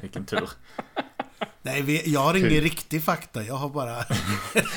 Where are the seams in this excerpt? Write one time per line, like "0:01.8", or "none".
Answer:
none